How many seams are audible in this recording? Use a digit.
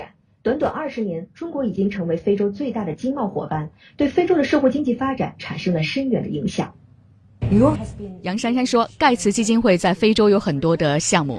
1